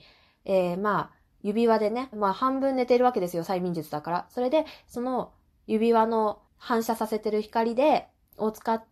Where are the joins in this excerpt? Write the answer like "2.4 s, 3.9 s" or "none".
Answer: 2.1 s, 6.5 s